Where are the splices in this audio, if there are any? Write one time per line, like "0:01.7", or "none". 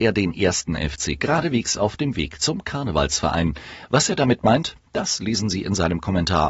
0:01.2